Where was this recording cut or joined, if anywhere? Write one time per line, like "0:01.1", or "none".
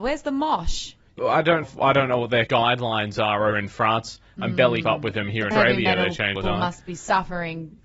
0:01.2
0:01.6
0:02.5
0:03.5
0:04.8
0:05.5
0:06.3